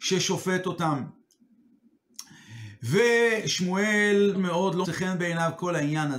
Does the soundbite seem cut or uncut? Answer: cut